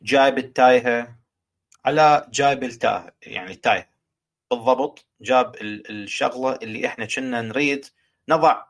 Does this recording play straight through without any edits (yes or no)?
yes